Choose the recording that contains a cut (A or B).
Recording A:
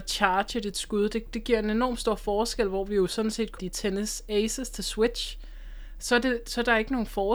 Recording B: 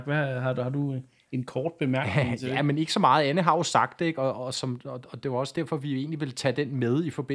A